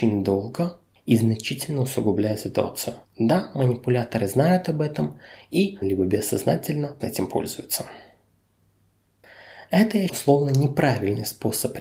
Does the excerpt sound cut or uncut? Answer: cut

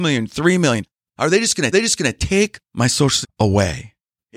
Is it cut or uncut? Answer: cut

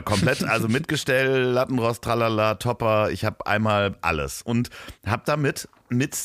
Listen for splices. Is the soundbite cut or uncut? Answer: uncut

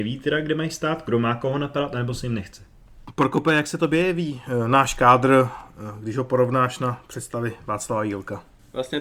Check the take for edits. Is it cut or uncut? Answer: uncut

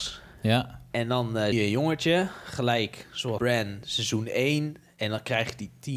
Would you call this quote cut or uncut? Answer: cut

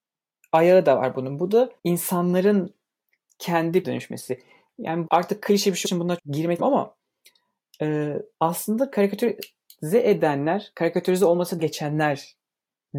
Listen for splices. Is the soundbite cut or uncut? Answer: cut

